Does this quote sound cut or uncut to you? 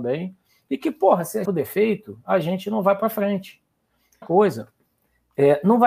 cut